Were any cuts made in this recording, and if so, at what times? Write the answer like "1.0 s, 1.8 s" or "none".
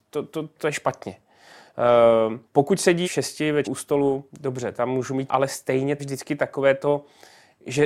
2.4 s, 3.0 s, 3.6 s, 4.3 s, 5.3 s, 6.0 s